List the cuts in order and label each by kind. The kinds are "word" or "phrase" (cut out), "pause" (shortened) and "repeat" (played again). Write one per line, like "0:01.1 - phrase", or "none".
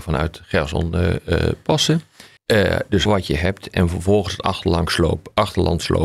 0:02.4 - pause
0:03.1 - word